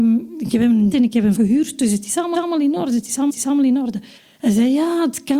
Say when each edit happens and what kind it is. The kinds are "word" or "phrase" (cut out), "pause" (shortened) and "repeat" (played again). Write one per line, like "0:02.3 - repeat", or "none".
0:00.9 - word
0:01.4 - word
0:02.3 - repeat
0:03.3 - repeat
0:04.2 - pause